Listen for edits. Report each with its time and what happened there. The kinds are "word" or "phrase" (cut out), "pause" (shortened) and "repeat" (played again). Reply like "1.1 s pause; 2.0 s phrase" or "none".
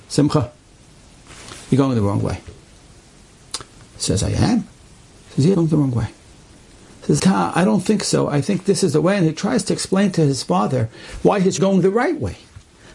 5.5 s word; 7.2 s word; 11.6 s word